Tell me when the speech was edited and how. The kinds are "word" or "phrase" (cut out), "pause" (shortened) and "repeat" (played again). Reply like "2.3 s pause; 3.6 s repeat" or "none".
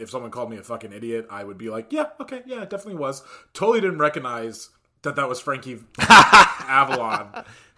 none